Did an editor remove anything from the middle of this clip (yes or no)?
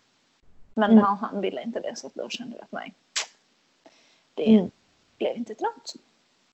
no